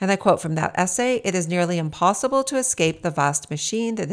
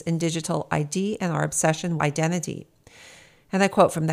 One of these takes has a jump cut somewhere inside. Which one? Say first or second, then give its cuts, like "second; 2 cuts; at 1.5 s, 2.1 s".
second; 1 cut; at 2.0 s